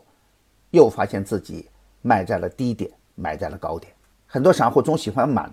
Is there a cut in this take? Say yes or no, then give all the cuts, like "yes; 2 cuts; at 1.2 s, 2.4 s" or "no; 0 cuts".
no; 0 cuts